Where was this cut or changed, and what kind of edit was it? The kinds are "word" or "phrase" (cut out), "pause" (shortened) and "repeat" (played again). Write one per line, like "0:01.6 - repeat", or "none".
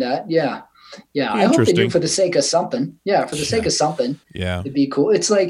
0:04.2 - pause